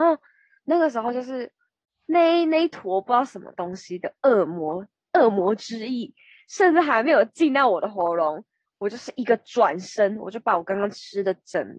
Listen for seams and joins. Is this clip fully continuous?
yes; 0 cuts

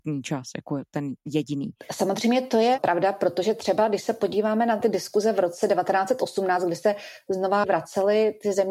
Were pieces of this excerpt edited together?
no; 0 cuts

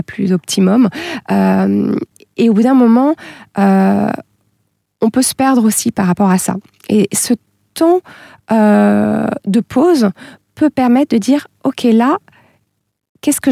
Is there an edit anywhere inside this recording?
no; 0 cuts

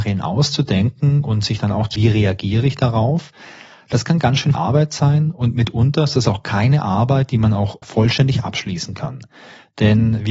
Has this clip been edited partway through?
yes; 3 cuts; at 1.9 s, 4.5 s, 7.8 s

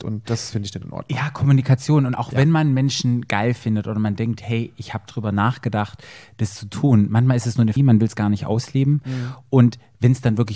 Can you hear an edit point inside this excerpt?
yes; 1 cut; at 7.8 s

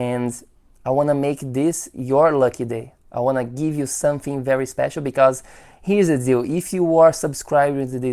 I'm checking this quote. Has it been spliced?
no; 0 cuts

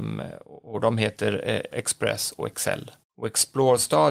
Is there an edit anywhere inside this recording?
yes; 2 cuts; at 1.7 s, 3.0 s

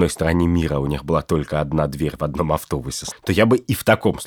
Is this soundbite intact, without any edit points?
no; 1 cut; at 3.1 s

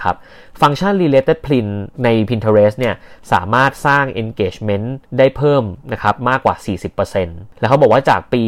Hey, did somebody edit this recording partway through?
yes; 3 cuts; at 1.9 s, 5.0 s, 5.8 s

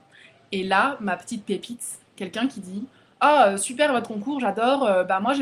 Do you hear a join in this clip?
no; 0 cuts

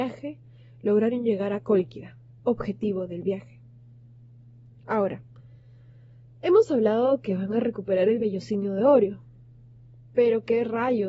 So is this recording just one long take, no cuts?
yes; 0 cuts

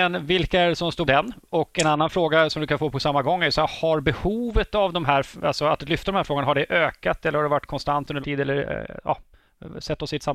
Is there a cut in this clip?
yes; 2 cuts; at 1.1 s, 8.2 s

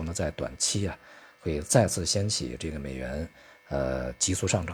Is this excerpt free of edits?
yes; 0 cuts

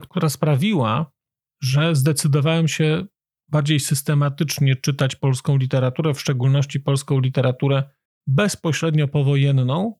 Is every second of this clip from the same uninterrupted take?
yes; 0 cuts

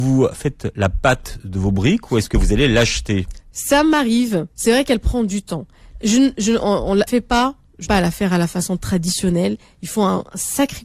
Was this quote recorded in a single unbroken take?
no; 3 cuts; at 4.5 s, 7.1 s, 7.8 s

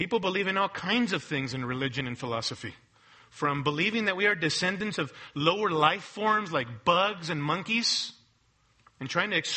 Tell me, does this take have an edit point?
no; 0 cuts

